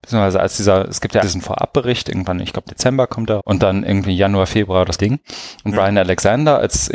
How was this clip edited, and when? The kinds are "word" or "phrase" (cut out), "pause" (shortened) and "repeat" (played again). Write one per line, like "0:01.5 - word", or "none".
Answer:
0:01.2 - word
0:02.7 - word
0:03.4 - word
0:05.0 - word